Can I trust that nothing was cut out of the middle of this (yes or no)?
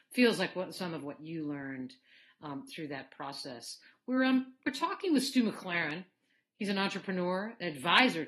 yes